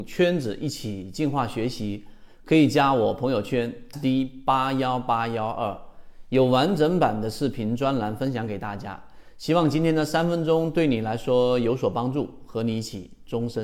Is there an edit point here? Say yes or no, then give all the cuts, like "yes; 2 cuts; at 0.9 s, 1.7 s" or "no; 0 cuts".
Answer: yes; 1 cut; at 3.9 s